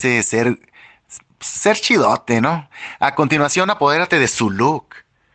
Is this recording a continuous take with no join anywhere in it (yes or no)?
yes